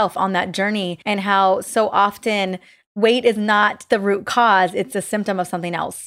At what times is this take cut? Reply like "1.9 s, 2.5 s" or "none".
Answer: 1.0 s